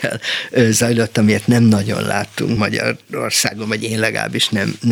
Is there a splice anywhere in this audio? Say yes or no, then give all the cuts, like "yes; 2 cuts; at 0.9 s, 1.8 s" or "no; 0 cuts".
no; 0 cuts